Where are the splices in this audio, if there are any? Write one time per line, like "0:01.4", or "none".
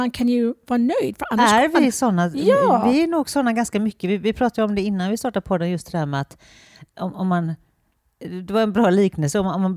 none